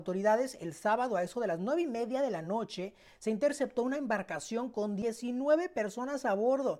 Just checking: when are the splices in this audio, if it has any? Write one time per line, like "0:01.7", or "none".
none

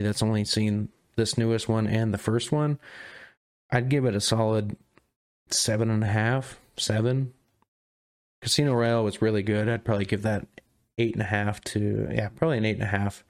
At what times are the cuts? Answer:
none

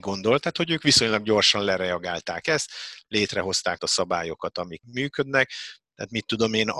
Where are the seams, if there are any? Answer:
0:03.8
0:04.8

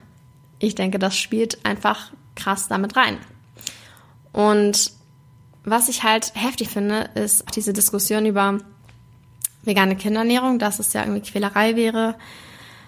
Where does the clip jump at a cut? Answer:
0:06.6
0:07.5

